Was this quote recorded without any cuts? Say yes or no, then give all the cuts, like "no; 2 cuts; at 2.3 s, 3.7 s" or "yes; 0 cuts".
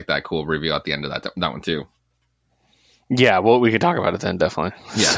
yes; 0 cuts